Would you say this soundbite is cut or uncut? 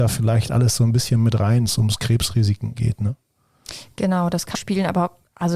cut